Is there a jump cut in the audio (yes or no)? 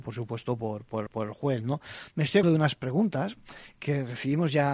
yes